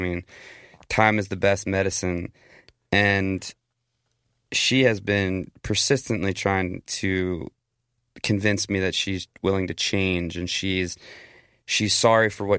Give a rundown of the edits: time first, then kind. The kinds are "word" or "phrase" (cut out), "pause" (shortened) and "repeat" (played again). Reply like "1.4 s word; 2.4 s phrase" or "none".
none